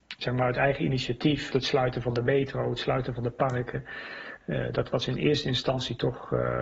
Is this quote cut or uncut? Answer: cut